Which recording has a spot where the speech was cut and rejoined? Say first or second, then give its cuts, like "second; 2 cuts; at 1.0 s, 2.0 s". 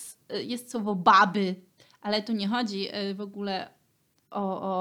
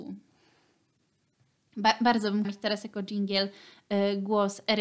second; 1 cut; at 2.4 s